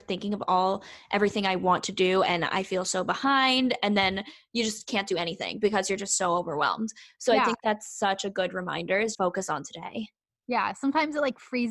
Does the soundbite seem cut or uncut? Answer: cut